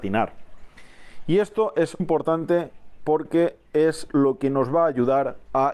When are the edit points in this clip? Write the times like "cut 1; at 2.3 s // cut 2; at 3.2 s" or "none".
cut 1; at 2.0 s